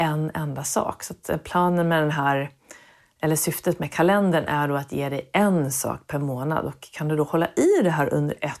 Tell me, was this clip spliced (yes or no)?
no